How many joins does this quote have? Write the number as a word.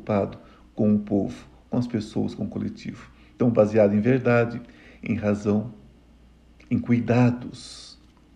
zero